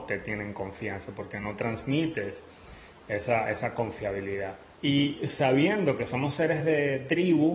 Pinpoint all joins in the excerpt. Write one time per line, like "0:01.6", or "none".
0:04.7